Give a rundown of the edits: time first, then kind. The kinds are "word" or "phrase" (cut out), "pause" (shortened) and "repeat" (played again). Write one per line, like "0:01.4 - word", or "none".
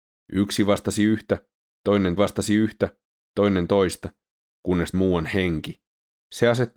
0:02.2 - repeat
0:04.9 - phrase

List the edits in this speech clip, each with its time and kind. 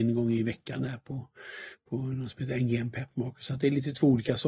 none

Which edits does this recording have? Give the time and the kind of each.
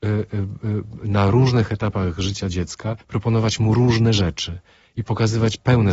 0:03.0 - pause

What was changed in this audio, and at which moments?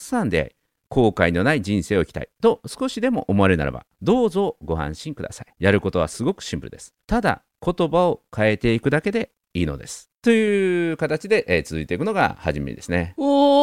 0:03.9 - pause
0:05.5 - pause
0:07.0 - pause
0:10.1 - pause

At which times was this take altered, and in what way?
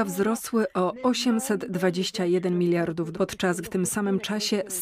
0:03.1 - word
0:03.6 - word

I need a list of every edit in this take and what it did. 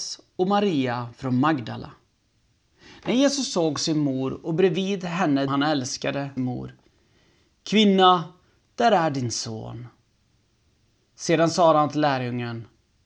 0:05.5 - phrase
0:06.4 - phrase

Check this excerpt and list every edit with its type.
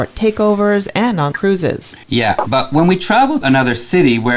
0:01.3 - word
0:02.0 - pause
0:03.4 - word

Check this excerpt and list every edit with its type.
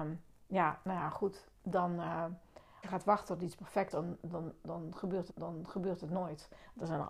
0:02.8 - word
0:03.9 - word
0:05.3 - repeat

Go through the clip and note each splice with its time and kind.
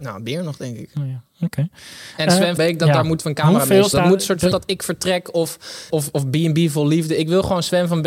0:02.6 - word
0:03.9 - word
0:04.5 - word
0:05.9 - word

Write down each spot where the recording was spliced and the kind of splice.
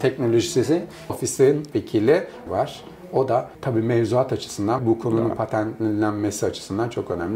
0:01.1 - word
0:01.7 - word
0:02.5 - phrase
0:03.5 - pause
0:04.8 - word

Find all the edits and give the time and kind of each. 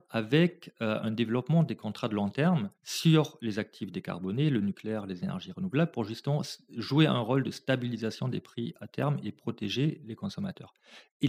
0:02.7 - pause

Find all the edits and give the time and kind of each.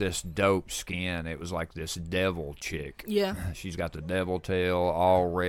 none

